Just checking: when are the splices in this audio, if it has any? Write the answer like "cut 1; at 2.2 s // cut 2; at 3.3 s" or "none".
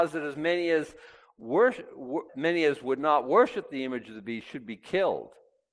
cut 1; at 2.3 s